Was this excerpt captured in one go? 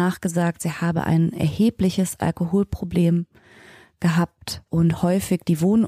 no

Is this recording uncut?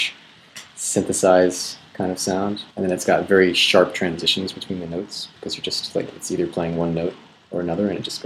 no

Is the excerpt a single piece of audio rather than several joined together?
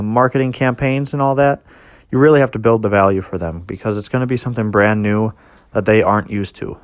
yes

